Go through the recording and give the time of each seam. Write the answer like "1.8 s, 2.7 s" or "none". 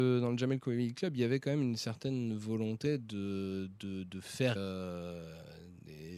4.6 s